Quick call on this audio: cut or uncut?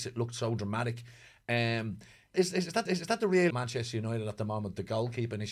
cut